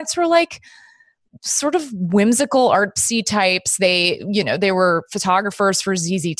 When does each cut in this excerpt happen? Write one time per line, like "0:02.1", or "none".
none

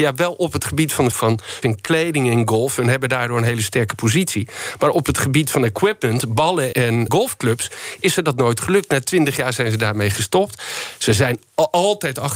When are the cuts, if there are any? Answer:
0:01.1
0:01.6
0:06.7
0:07.1

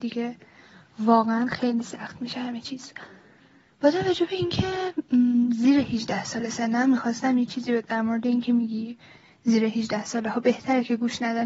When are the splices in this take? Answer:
none

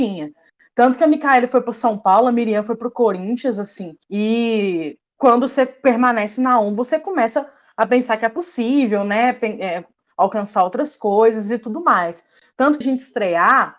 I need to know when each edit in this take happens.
0:04.0
0:12.8

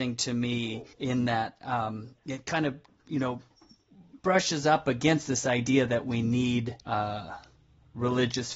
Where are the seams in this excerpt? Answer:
0:00.9
0:03.0
0:06.8

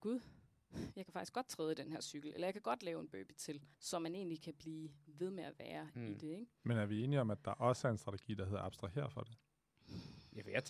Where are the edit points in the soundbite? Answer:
0:03.7

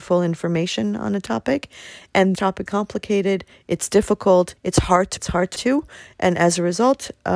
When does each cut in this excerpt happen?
0:02.3
0:02.7
0:04.6
0:05.2
0:05.6

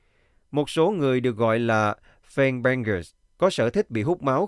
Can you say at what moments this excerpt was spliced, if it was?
none

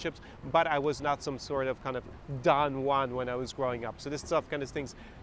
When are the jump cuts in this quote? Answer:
none

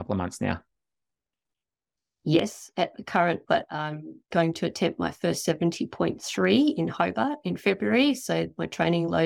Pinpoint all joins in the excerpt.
0:03.5

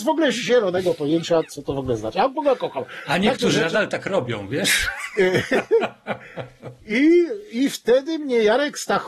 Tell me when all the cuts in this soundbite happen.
none

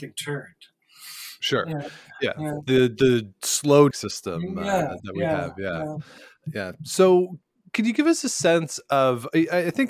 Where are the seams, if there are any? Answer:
0:03.9
0:05.0

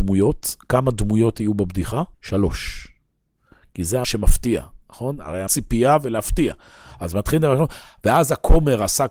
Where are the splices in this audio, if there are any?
0:02.1
0:04.0
0:05.5

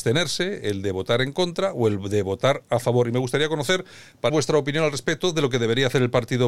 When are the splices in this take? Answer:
0:04.3

